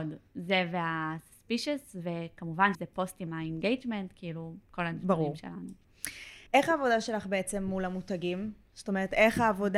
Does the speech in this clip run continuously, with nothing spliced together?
no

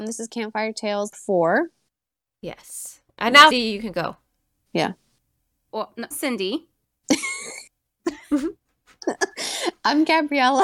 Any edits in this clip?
yes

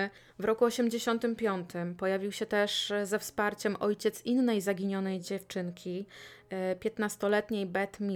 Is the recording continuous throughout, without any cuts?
yes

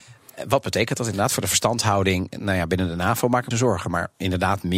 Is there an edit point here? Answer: yes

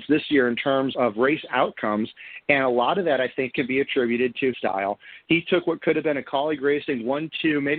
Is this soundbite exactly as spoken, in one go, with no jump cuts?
no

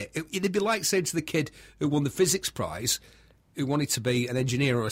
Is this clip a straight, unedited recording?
yes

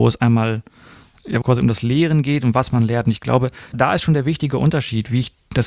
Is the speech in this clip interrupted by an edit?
yes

